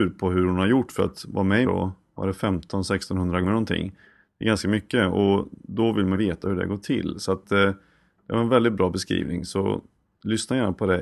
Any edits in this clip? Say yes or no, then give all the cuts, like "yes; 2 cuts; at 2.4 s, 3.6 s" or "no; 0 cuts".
yes; 3 cuts; at 1.6 s, 3.4 s, 6.1 s